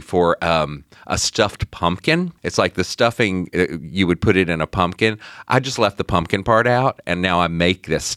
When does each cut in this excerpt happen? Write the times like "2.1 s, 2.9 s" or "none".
2.4 s